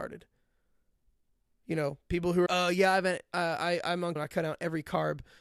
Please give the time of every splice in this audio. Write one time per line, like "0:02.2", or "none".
0:02.5
0:04.2